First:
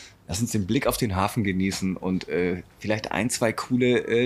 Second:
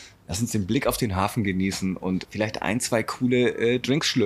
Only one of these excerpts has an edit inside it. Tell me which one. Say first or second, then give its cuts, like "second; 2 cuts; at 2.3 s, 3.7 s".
second; 1 cut; at 2.2 s